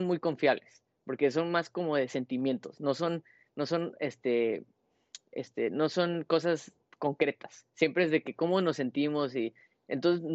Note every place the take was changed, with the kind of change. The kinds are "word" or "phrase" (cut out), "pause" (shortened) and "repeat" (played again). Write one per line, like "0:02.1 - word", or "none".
none